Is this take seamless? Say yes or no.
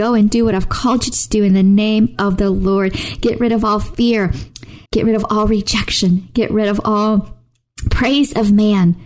no